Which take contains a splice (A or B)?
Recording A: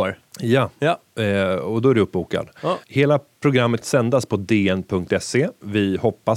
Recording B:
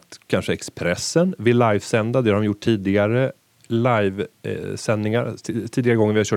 A